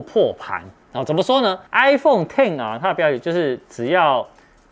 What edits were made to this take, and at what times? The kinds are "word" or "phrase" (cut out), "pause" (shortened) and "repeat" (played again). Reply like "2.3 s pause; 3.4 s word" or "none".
1.7 s pause